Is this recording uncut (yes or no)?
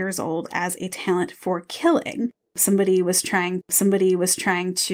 no